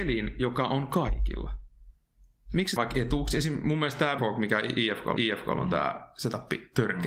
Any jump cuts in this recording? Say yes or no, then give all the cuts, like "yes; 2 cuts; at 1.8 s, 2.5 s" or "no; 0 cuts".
yes; 3 cuts; at 2.8 s, 4.2 s, 5.2 s